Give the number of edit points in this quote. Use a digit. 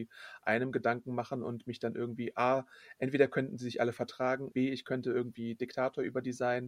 1